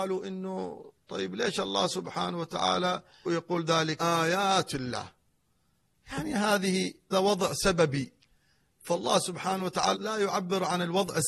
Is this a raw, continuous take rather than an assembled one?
no; 4 cuts; at 3.3 s, 4.0 s, 7.1 s, 10.0 s

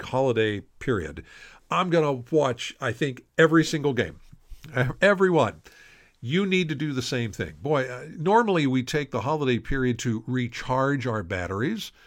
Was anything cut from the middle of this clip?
no; 0 cuts

